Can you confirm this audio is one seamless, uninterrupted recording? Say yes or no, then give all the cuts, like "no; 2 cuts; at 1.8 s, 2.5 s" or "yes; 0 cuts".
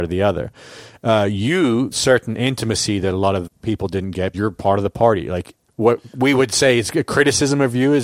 no; 4 cuts; at 1.9 s, 3.5 s, 4.3 s, 5.7 s